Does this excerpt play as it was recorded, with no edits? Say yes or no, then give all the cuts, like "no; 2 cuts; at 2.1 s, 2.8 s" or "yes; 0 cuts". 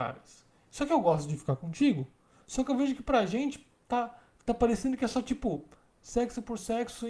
yes; 0 cuts